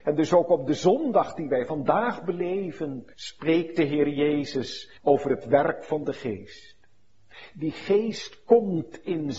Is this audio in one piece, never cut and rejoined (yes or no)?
no